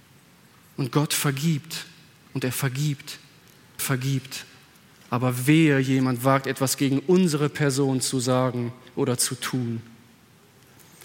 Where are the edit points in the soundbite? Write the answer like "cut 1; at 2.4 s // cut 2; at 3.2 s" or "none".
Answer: cut 1; at 3.8 s